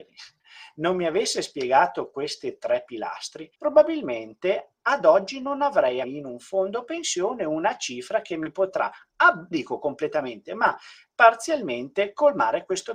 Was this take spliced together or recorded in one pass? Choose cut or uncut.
cut